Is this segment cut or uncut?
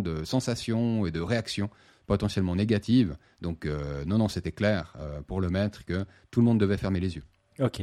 uncut